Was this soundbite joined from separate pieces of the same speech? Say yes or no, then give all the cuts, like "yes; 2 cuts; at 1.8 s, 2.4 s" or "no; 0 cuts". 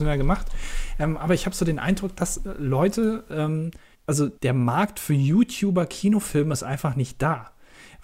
yes; 2 cuts; at 3.9 s, 4.4 s